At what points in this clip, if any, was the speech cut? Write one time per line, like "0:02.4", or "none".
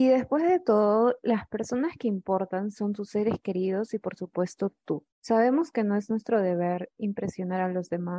0:05.1